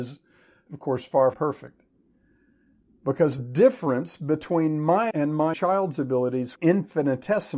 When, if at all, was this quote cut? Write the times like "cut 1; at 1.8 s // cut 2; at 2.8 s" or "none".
cut 1; at 1.3 s // cut 2; at 3.4 s // cut 3; at 5.1 s // cut 4; at 5.5 s // cut 5; at 6.6 s